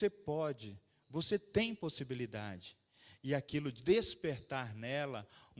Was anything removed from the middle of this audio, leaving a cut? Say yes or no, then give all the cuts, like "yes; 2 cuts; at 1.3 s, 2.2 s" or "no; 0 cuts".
no; 0 cuts